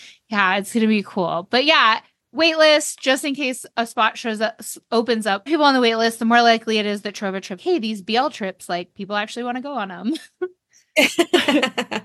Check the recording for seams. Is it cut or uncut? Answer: cut